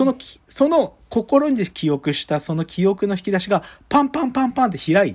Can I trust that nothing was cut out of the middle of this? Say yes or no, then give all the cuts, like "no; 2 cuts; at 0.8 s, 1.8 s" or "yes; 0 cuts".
yes; 0 cuts